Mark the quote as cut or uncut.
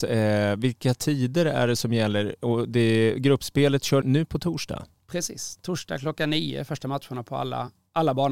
cut